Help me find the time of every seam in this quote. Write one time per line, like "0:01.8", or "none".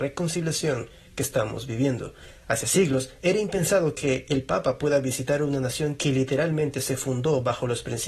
none